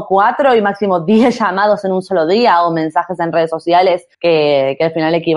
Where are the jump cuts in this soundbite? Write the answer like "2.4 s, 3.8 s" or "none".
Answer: 4.1 s